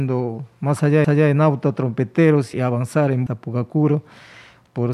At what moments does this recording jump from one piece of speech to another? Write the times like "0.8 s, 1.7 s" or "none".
1.0 s, 2.5 s, 3.3 s